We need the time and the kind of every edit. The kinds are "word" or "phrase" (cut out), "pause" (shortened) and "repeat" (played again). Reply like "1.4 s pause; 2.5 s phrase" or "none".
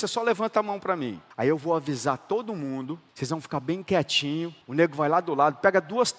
1.3 s pause; 3.1 s pause; 4.6 s pause